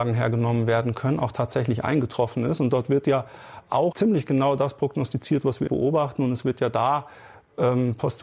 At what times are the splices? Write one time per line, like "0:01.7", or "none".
0:03.9
0:05.7